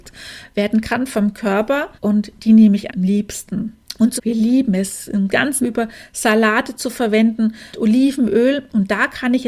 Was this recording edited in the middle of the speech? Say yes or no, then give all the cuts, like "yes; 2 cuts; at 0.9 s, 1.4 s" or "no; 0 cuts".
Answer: yes; 5 cuts; at 2.0 s, 2.9 s, 4.2 s, 5.6 s, 7.7 s